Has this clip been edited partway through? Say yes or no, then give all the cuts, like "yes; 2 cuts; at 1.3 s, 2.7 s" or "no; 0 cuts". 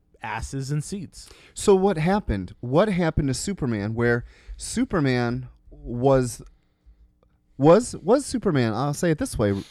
yes; 1 cut; at 5.6 s